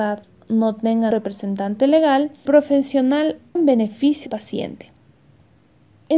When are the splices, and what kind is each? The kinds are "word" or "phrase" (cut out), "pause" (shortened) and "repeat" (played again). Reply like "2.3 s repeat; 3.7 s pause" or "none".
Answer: 1.1 s word; 2.5 s word; 3.6 s word; 4.3 s word